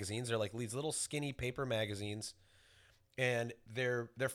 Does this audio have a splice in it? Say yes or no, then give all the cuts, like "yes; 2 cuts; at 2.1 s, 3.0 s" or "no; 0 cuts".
no; 0 cuts